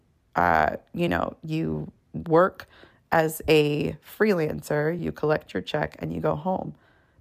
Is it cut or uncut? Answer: uncut